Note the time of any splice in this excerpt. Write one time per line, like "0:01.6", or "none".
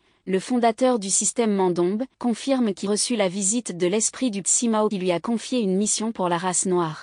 0:02.1
0:02.9
0:04.4
0:04.9